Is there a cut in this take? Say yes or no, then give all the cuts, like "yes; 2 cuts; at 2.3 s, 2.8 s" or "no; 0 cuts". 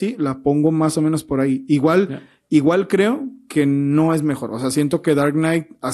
no; 0 cuts